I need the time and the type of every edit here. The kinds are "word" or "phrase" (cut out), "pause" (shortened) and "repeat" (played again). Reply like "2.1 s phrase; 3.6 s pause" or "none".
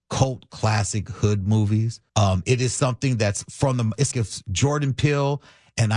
2.1 s pause; 4.1 s word

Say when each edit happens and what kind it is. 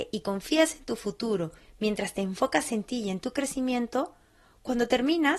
none

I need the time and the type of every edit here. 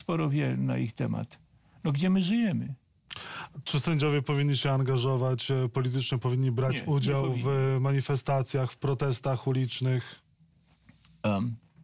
none

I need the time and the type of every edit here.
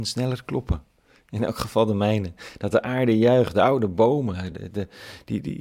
none

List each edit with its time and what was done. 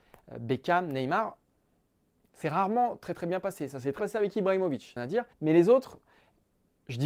2.4 s word; 4.0 s word; 5.0 s phrase; 5.3 s pause

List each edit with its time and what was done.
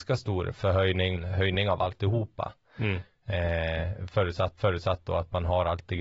1.1 s word; 4.6 s repeat

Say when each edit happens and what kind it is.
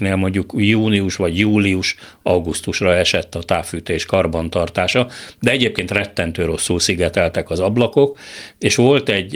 none

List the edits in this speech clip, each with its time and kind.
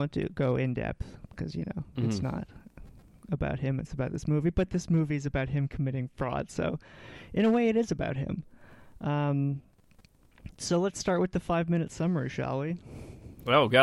none

